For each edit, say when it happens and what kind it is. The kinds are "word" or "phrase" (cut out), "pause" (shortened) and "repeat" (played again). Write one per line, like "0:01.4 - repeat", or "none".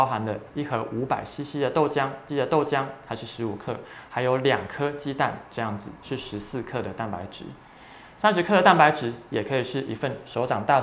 0:02.3 - repeat